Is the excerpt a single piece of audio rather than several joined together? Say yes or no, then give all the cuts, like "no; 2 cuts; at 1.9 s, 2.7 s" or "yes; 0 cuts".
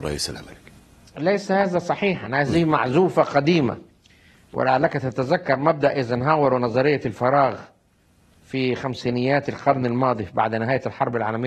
yes; 0 cuts